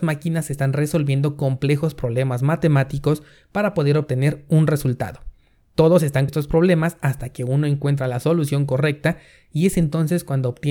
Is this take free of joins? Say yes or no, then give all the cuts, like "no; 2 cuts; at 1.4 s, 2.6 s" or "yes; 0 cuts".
no; 1 cut; at 6.3 s